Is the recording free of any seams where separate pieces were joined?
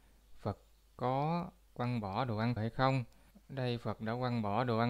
no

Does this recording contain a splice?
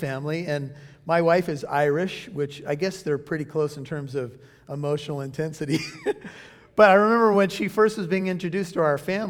no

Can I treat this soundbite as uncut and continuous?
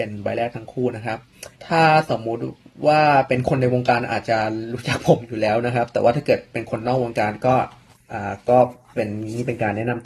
no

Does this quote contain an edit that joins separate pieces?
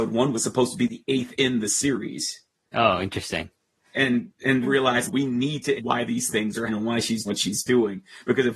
yes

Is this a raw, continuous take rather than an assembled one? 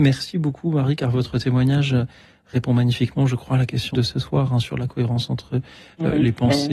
no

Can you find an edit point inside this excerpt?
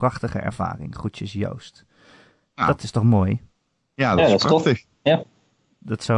no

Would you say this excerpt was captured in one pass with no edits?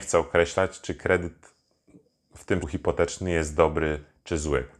no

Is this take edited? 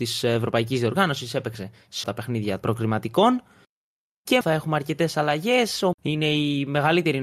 yes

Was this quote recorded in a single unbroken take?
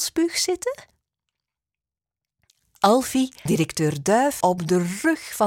no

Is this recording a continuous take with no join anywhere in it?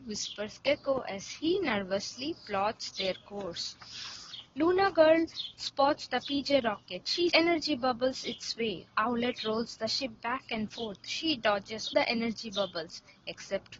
no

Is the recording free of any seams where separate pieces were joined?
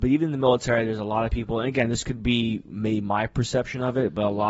yes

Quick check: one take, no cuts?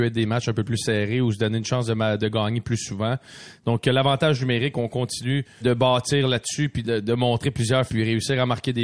no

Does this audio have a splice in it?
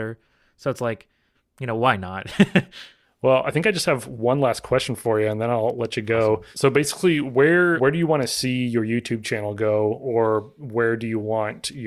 no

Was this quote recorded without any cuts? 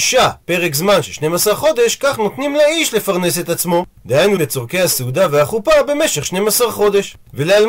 no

